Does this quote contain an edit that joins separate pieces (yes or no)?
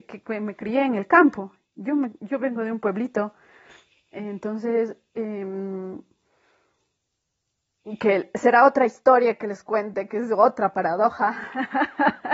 no